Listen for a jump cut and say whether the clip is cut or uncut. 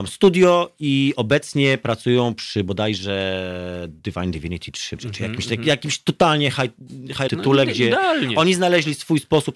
cut